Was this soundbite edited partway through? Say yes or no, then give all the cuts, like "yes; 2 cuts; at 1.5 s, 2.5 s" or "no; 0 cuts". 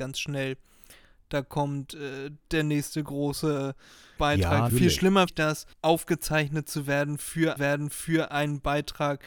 yes; 6 cuts; at 2.4 s, 4.2 s, 4.7 s, 5.3 s, 5.7 s, 7.6 s